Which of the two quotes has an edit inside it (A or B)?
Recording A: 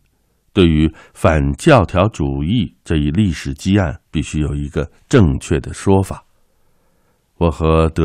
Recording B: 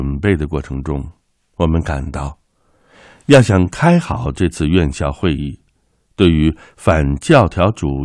A